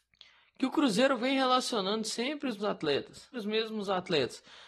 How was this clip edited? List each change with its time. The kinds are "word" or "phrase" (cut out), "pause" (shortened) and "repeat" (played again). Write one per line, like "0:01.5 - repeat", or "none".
0:02.6 - word
0:03.3 - word